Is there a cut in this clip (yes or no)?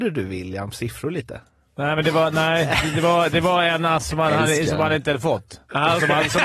no